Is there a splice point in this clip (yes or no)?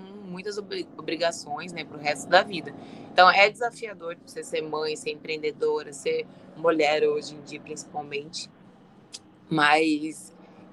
no